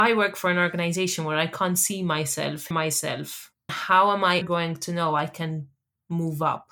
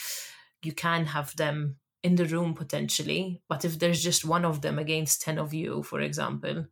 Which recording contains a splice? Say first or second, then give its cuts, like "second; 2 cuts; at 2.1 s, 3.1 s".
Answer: first; 3 cuts; at 2.7 s, 3.7 s, 4.4 s